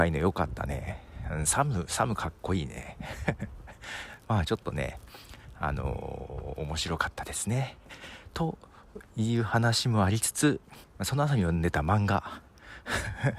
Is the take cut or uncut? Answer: cut